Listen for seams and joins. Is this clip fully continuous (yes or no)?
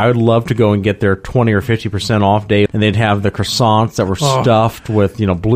no